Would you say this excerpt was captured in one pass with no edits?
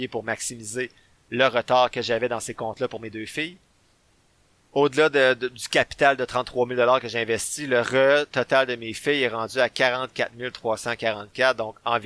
yes; 0 cuts

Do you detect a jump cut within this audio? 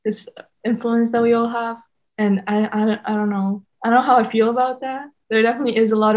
no; 0 cuts

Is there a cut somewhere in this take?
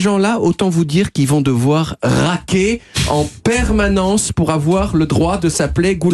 no; 0 cuts

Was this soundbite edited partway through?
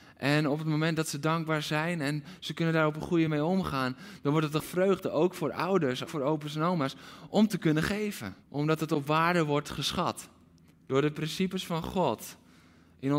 yes; 5 cuts; at 3.3 s, 4.6 s, 6.1 s, 8.4 s, 10.7 s

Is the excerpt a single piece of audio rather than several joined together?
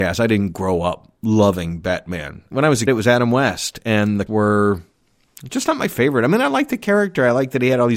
no; 4 cuts; at 1.2 s, 2.5 s, 2.9 s, 4.3 s

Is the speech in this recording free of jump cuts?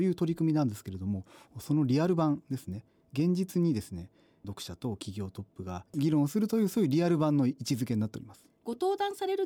no; 1 cut; at 5.9 s

